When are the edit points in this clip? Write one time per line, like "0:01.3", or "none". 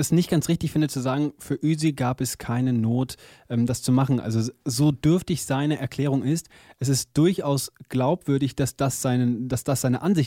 none